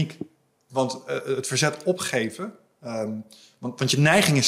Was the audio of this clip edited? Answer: no; 0 cuts

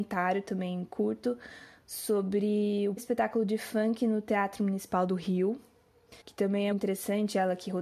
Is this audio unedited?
no; 3 cuts; at 3.0 s, 6.2 s, 6.7 s

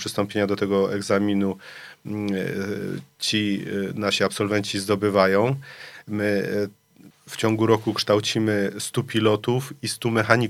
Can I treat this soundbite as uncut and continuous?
no; 1 cut; at 7.1 s

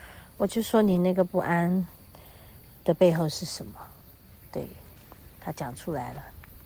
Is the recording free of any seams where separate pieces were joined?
yes; 0 cuts

